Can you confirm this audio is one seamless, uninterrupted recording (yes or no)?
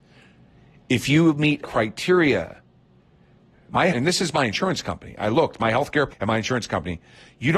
no